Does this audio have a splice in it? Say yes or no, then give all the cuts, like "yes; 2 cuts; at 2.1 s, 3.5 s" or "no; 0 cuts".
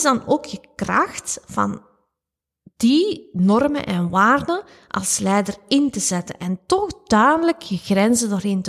no; 0 cuts